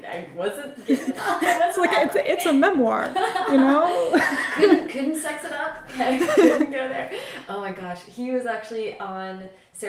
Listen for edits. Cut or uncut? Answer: uncut